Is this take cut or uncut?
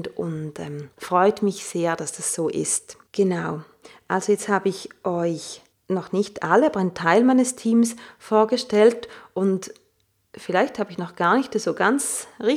cut